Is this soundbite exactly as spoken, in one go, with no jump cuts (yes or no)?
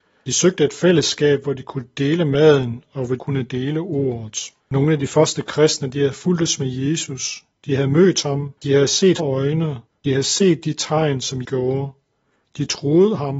no